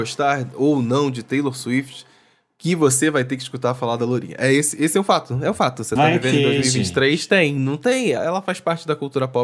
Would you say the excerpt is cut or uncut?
uncut